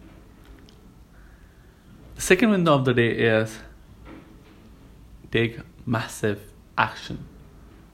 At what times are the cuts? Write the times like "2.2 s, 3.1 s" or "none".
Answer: 5.8 s